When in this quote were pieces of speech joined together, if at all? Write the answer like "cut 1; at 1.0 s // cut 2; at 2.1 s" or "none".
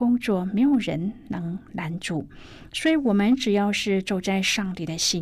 none